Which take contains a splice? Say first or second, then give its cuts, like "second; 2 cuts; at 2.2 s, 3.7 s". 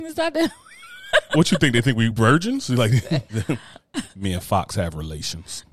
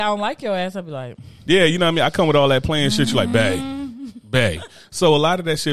first; 2 cuts; at 2.1 s, 3.3 s